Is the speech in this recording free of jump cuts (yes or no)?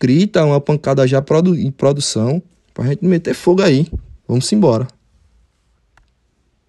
no